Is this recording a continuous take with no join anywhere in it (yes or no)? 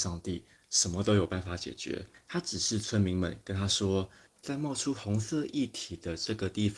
yes